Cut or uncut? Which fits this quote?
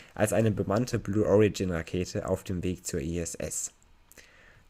uncut